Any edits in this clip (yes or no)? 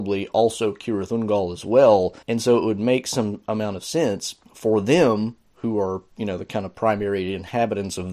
yes